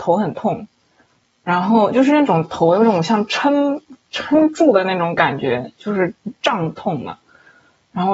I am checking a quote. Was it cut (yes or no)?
no